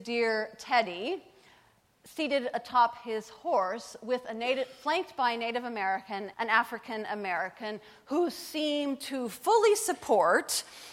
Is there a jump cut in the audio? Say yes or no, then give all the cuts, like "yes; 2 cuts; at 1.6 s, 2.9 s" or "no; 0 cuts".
yes; 1 cut; at 6.3 s